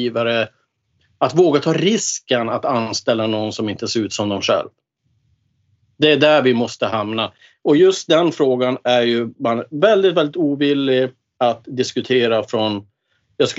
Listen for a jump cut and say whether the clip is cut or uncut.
uncut